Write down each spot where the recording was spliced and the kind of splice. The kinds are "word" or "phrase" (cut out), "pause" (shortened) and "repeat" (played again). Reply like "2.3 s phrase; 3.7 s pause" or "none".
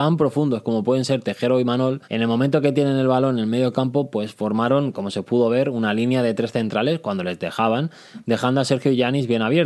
2.0 s pause